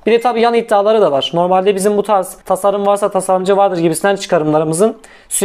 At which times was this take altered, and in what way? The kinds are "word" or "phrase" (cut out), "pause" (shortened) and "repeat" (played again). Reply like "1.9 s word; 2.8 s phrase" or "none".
2.4 s pause